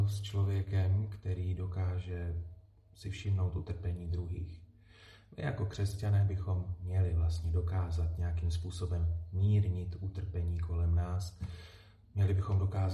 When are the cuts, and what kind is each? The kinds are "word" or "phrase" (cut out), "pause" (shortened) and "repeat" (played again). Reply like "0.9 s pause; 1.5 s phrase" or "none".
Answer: none